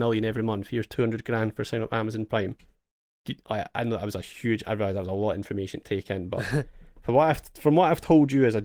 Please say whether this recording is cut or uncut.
uncut